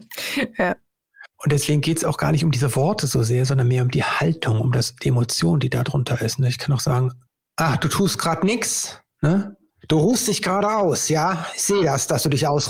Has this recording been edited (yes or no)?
yes